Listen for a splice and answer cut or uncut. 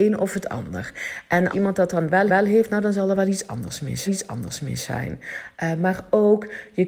cut